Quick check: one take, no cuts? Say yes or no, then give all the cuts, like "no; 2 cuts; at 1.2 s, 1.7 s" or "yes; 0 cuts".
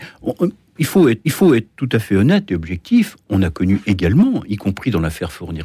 no; 1 cut; at 1.2 s